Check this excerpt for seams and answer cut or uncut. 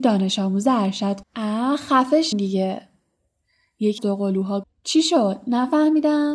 cut